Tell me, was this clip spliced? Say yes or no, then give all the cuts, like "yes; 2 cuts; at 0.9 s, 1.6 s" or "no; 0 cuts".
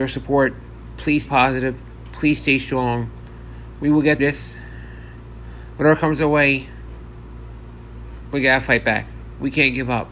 yes; 2 cuts; at 1.3 s, 4.2 s